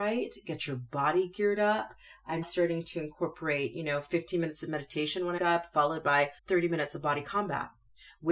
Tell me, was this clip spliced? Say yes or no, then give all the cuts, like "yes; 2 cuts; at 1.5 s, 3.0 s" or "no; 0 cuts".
yes; 3 cuts; at 2.4 s, 5.4 s, 6.4 s